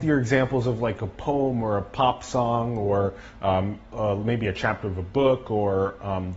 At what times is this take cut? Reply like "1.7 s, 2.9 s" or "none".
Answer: none